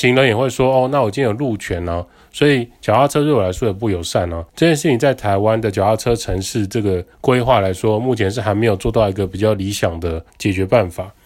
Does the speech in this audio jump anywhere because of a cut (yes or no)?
yes